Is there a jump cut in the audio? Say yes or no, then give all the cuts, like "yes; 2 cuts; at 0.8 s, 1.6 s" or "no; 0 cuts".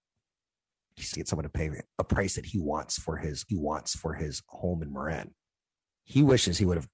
yes; 4 cuts; at 1.1 s, 1.9 s, 3.5 s, 5.5 s